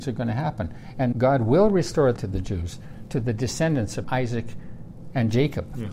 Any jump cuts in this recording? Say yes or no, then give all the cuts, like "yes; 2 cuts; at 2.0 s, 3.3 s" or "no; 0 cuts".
yes; 3 cuts; at 1.1 s, 2.2 s, 4.0 s